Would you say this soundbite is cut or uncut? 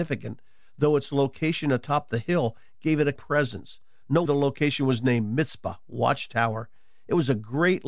cut